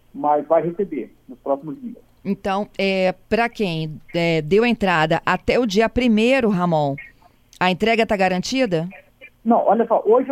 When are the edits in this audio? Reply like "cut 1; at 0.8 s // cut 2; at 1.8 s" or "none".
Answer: cut 1; at 2.2 s // cut 2; at 3.2 s // cut 3; at 7.3 s // cut 4; at 9.3 s

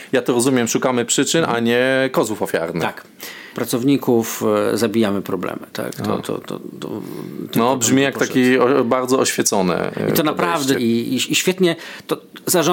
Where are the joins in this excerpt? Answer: cut 1; at 3.5 s // cut 2; at 10.7 s

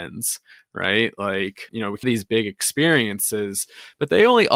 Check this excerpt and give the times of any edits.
cut 1; at 1.7 s // cut 2; at 2.0 s

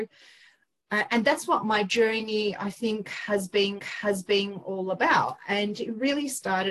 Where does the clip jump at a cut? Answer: cut 1; at 3.8 s

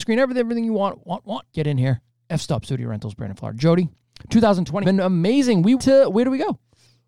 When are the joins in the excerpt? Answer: cut 1; at 1.0 s // cut 2; at 1.5 s // cut 3; at 2.1 s // cut 4; at 4.8 s // cut 5; at 5.8 s

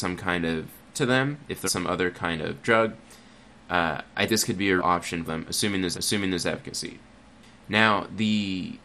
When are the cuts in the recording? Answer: cut 1; at 0.9 s // cut 2; at 1.7 s // cut 3; at 4.3 s // cut 4; at 4.8 s // cut 5; at 5.3 s // cut 6; at 5.9 s

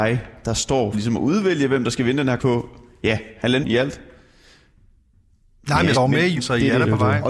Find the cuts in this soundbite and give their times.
cut 1; at 0.9 s // cut 2; at 2.4 s // cut 3; at 3.6 s // cut 4; at 5.9 s // cut 5; at 6.4 s

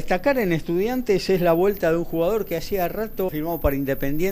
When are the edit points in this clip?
cut 1; at 3.3 s

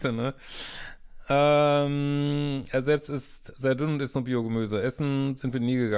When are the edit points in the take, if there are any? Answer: none

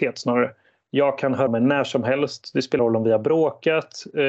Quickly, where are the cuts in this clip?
cut 1; at 1.5 s // cut 2; at 2.8 s

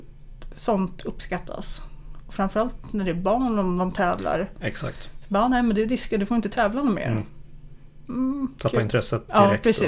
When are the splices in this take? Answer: none

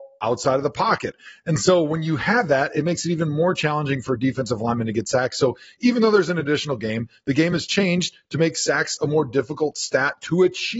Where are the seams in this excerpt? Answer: none

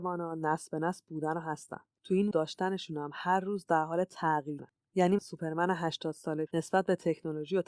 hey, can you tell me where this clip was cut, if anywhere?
cut 1; at 2.3 s // cut 2; at 4.6 s // cut 3; at 5.2 s // cut 4; at 6.5 s

